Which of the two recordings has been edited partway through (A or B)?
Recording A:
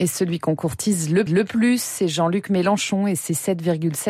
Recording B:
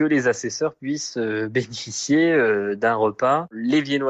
A